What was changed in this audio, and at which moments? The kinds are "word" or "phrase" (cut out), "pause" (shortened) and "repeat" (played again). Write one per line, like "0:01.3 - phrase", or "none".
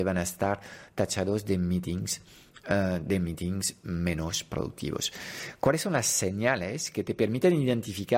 none